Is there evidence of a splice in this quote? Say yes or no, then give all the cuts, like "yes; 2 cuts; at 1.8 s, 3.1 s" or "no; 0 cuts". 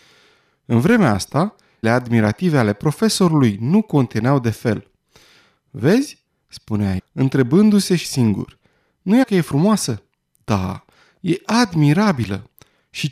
yes; 4 cuts; at 1.8 s, 7.0 s, 8.0 s, 9.2 s